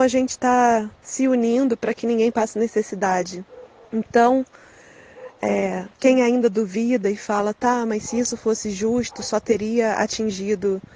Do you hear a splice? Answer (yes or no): yes